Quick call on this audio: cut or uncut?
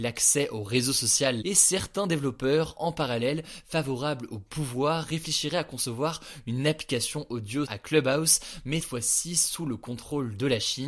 cut